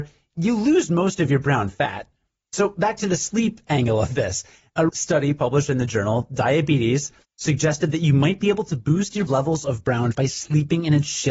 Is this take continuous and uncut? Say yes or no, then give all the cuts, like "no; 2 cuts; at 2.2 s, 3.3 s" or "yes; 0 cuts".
no; 3 cuts; at 4.9 s, 9.3 s, 10.1 s